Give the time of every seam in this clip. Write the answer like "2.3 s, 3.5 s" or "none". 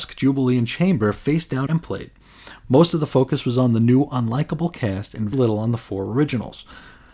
1.7 s, 5.3 s